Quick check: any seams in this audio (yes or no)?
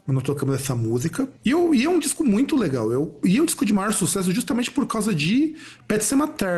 no